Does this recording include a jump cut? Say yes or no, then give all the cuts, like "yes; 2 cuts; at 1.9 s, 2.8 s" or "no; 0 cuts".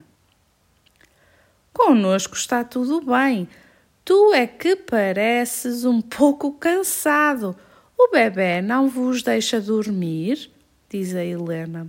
no; 0 cuts